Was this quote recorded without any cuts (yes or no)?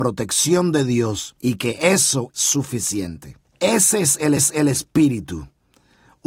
no